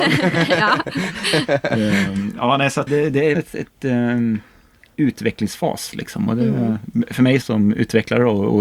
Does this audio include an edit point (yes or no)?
yes